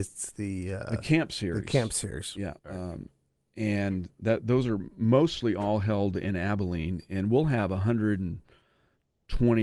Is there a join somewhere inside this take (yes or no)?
yes